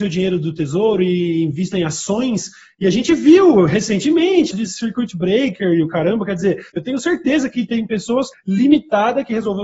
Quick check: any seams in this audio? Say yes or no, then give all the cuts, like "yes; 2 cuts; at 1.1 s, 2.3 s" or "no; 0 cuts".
yes; 3 cuts; at 4.5 s, 6.7 s, 8.3 s